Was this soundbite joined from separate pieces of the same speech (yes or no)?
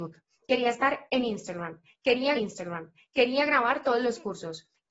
yes